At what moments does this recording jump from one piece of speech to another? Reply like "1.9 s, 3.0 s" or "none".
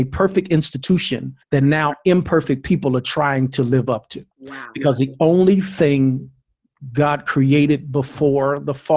1.4 s, 4.3 s